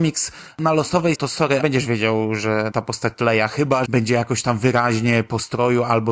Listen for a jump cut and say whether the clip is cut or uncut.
cut